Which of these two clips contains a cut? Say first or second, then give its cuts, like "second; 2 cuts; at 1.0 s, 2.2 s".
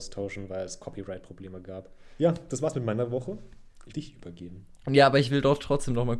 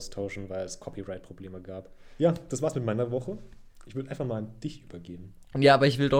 first; 1 cut; at 3.9 s